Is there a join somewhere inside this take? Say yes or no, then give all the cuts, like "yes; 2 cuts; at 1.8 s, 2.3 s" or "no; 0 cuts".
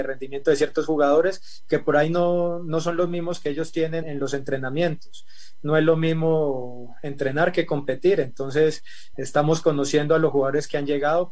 yes; 2 cuts; at 4.0 s, 9.1 s